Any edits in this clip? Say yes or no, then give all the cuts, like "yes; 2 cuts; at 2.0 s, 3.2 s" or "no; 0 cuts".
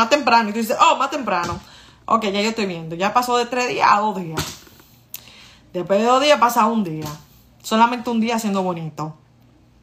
no; 0 cuts